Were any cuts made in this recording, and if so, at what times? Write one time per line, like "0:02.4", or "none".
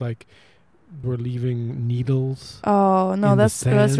0:01.0